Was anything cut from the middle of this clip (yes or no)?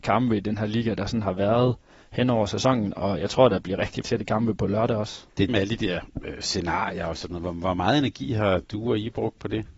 yes